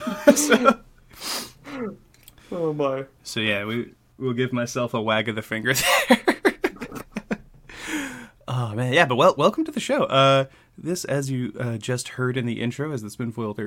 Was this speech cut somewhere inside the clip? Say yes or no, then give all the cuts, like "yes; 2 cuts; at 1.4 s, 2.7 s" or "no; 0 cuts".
no; 0 cuts